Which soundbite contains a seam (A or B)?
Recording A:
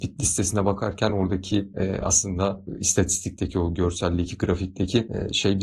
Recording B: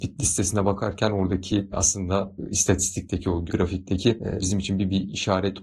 B